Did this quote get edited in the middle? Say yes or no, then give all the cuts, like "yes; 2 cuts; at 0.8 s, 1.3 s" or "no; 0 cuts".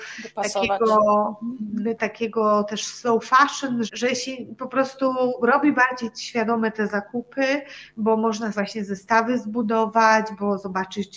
yes; 3 cuts; at 2.0 s, 3.9 s, 8.5 s